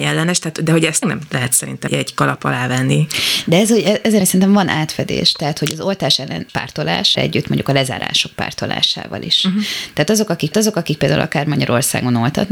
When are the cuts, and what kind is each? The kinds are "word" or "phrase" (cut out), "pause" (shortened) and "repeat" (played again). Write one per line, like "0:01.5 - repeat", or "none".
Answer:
0:01.0 - phrase
0:01.9 - word
0:04.2 - word
0:06.5 - phrase
0:07.1 - phrase
0:10.5 - repeat